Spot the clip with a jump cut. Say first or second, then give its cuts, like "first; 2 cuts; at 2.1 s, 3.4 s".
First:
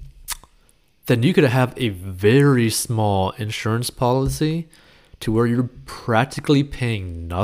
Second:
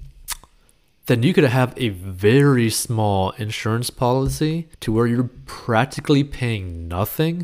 second; 1 cut; at 4.7 s